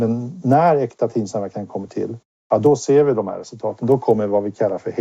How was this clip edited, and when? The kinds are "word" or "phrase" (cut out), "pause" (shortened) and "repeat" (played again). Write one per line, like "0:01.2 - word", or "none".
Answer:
none